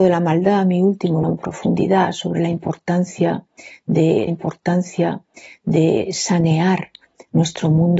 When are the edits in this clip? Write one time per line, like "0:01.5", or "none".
0:01.2
0:04.3